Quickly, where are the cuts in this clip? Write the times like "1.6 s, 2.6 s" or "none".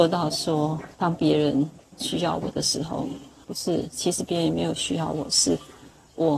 0.9 s, 3.4 s